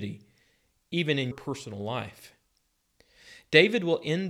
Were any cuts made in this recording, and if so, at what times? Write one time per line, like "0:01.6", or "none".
0:01.3